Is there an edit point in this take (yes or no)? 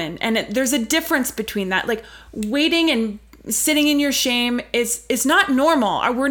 no